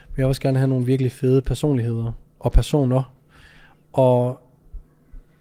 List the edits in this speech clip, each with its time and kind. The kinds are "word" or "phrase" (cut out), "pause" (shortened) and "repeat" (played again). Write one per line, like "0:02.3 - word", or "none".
none